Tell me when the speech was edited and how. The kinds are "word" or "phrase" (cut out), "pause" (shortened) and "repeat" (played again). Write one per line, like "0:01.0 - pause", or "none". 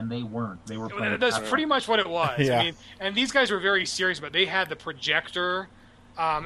none